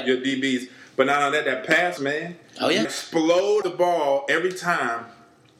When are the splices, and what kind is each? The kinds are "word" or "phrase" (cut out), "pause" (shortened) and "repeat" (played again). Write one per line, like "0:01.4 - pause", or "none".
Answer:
0:02.0 - word
0:02.8 - word
0:03.6 - word